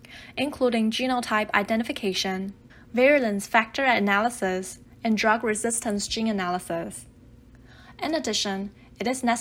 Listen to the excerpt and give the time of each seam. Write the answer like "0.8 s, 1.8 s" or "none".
2.7 s, 4.9 s